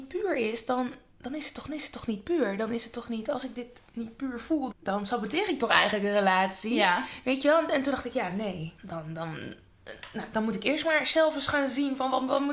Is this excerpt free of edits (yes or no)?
no